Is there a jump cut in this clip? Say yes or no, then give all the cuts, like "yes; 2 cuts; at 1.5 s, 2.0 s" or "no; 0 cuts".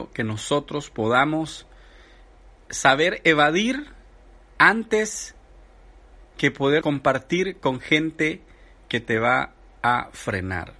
yes; 1 cut; at 6.8 s